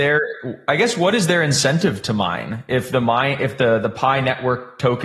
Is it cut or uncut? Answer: uncut